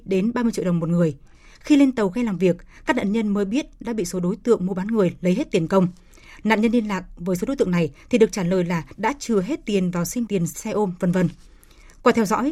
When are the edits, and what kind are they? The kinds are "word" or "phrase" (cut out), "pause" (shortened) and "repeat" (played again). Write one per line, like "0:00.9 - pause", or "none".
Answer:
0:10.3 - word

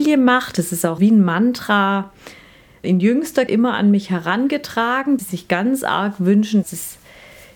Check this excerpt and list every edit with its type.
0:01.0 - word
0:02.8 - word
0:03.5 - word
0:05.2 - word
0:06.6 - word

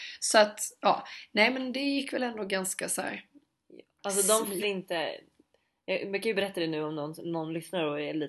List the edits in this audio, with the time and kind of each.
0:04.6 - word

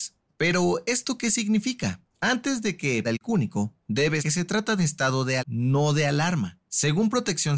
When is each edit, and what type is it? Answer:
0:03.0 - word
0:04.2 - word
0:04.8 - phrase
0:05.4 - word

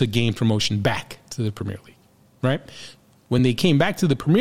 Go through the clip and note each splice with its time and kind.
none

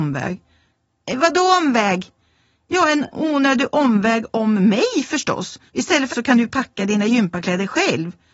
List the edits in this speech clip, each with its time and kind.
0:05.7 - pause
0:06.1 - phrase

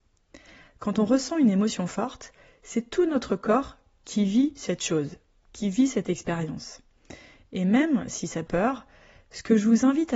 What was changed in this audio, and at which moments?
0:08.5 - word

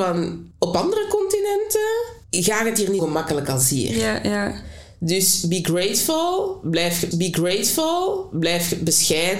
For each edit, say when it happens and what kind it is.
0:02.2 - pause
0:03.0 - word
0:07.1 - repeat

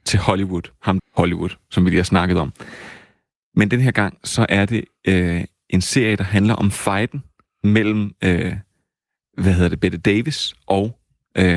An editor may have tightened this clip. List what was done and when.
0:01.0 - phrase

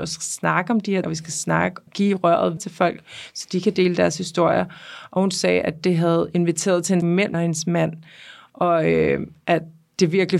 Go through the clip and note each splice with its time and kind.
0:01.0 - word
0:01.9 - word
0:02.6 - word
0:07.0 - word
0:07.3 - word

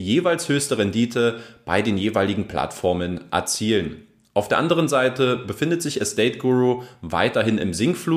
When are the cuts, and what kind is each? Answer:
none

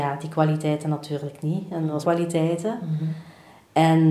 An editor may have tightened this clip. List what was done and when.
0:02.0 - phrase

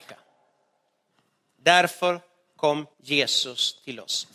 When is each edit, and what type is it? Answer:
0:02.9 - pause

